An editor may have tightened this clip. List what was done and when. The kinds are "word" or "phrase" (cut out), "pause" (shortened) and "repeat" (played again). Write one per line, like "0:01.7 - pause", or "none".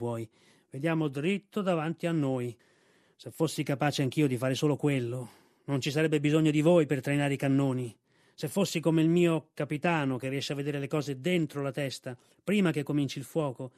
none